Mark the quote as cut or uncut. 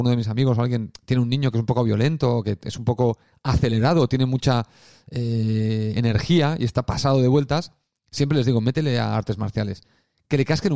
uncut